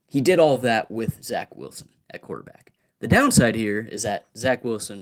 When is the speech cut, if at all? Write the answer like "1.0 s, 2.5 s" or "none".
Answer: none